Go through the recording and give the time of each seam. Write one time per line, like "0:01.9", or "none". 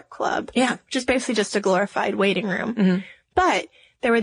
none